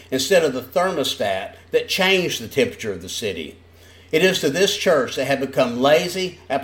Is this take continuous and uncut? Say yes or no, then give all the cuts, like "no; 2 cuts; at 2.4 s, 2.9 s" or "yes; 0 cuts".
yes; 0 cuts